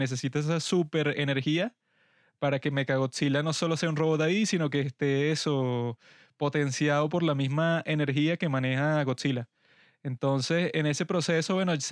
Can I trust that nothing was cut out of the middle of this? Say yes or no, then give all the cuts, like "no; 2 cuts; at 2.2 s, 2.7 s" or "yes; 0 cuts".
yes; 0 cuts